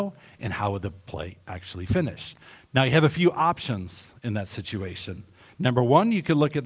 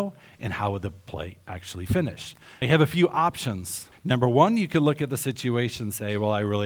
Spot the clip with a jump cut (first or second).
second